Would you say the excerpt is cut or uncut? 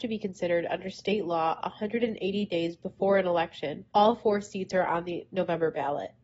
cut